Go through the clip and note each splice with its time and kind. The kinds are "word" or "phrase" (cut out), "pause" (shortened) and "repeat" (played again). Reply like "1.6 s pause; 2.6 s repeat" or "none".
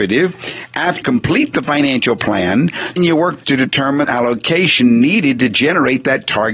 1.0 s word; 3.0 s word; 3.4 s word; 4.0 s phrase